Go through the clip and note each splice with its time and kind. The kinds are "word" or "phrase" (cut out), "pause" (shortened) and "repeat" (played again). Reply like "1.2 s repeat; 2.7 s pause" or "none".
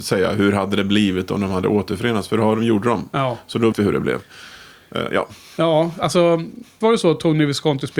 3.7 s word; 6.8 s word